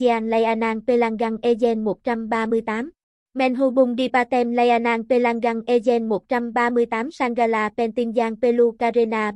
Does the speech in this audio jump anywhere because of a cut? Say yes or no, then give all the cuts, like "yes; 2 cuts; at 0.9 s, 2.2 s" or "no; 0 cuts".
yes; 1 cut; at 3.2 s